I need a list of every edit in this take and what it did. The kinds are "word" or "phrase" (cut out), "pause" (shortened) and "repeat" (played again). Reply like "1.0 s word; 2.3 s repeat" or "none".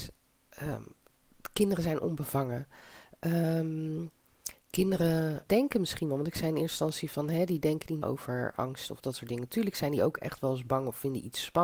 5.5 s word; 8.0 s word